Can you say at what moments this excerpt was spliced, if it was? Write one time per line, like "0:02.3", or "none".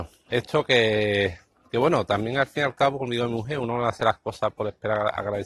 none